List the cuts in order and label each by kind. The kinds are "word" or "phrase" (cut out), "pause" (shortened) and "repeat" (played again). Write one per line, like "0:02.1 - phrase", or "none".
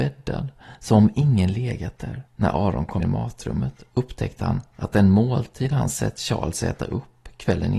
0:02.3 - pause
0:03.0 - word